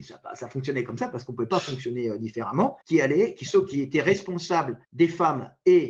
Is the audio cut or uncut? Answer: cut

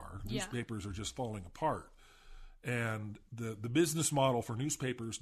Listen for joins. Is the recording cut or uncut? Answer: cut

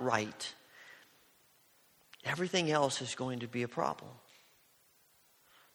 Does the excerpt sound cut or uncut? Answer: uncut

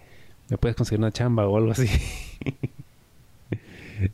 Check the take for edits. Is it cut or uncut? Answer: uncut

